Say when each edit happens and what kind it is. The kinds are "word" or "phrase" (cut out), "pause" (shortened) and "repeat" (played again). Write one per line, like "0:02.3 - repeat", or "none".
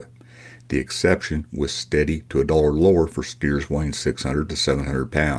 none